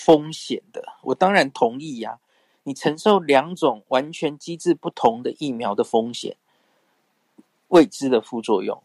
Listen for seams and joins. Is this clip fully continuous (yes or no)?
yes